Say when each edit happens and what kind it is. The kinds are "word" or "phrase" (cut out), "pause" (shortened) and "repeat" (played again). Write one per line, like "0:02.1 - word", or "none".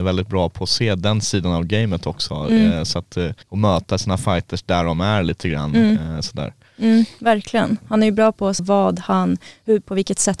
0:03.4 - pause
0:08.6 - word